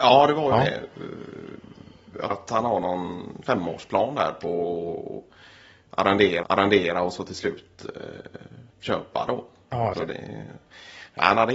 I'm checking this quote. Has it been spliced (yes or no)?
yes